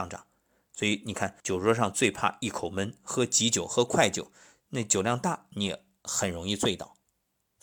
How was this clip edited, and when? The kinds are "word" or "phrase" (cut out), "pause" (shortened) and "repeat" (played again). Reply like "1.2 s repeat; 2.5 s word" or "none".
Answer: 1.4 s pause; 6.0 s pause